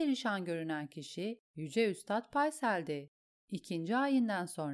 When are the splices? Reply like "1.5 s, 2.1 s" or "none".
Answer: none